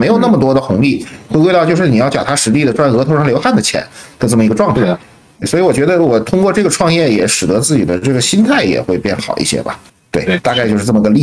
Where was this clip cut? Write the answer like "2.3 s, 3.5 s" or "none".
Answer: 5.4 s, 9.9 s